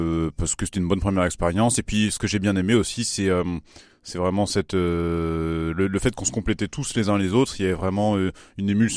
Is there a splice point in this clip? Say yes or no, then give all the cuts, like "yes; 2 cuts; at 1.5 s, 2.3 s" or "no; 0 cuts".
no; 0 cuts